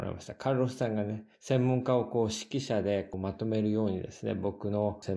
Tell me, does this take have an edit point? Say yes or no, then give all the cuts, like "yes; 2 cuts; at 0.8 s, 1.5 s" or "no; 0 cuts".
yes; 1 cut; at 1.3 s